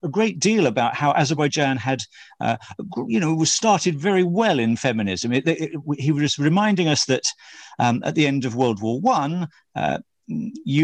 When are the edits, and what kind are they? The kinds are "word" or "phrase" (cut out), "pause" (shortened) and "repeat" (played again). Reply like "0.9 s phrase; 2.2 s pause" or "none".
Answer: none